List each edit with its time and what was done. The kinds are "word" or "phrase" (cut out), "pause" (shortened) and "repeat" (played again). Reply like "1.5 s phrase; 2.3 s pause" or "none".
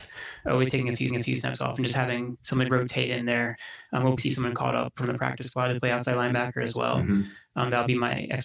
1.1 s repeat; 4.2 s word